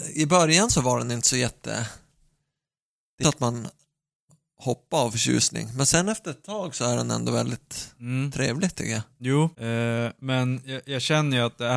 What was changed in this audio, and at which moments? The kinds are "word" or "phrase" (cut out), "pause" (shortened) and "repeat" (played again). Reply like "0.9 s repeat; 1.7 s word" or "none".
3.2 s phrase; 9.5 s pause